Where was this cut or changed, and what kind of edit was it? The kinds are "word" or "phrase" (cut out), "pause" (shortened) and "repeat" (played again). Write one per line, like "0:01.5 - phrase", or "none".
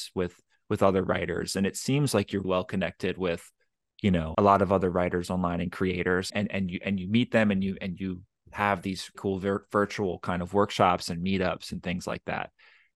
0:02.4 - word
0:04.3 - word
0:06.3 - word
0:09.1 - word